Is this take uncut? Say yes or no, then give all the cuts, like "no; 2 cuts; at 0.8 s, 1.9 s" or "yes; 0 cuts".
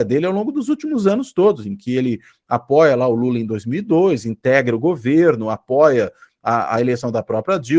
yes; 0 cuts